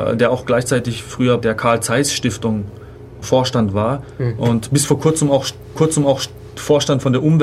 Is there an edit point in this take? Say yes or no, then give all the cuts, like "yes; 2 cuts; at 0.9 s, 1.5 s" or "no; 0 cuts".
yes; 3 cuts; at 1.4 s, 3.2 s, 5.8 s